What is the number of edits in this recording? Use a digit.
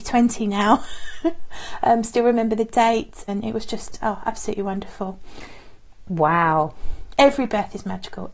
1